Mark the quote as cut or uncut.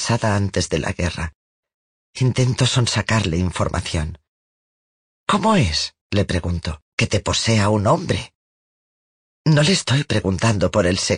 cut